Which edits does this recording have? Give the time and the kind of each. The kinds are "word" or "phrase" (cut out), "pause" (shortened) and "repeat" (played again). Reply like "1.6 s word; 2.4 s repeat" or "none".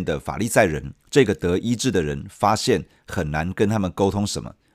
1.0 s pause